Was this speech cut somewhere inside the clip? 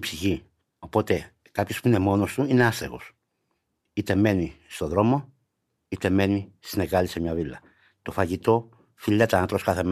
no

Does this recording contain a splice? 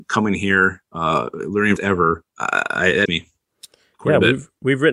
yes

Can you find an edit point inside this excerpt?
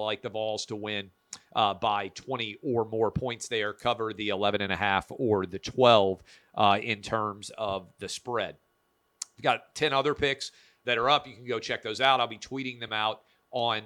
no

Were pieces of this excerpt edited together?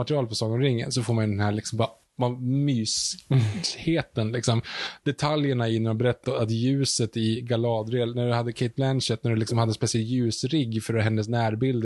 yes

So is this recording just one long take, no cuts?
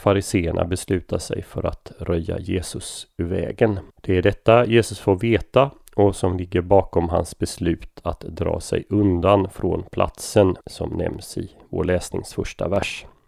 no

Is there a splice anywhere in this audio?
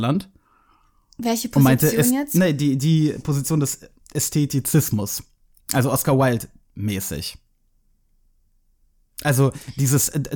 no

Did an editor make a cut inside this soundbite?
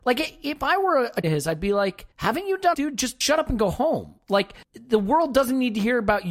yes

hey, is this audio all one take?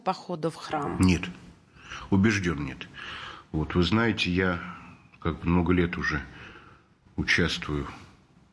yes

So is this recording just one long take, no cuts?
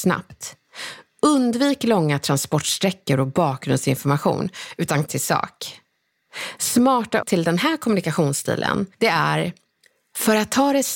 no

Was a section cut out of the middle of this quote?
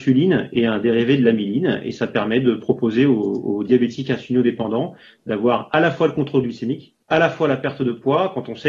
yes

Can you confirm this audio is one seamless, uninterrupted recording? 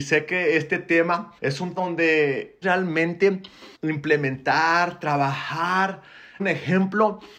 no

